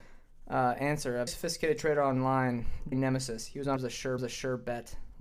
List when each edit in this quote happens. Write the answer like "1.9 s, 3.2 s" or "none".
1.3 s, 2.9 s, 3.8 s, 4.2 s